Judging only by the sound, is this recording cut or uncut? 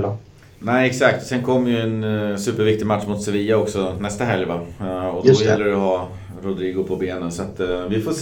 uncut